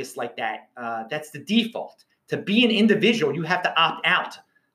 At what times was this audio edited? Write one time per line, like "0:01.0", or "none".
none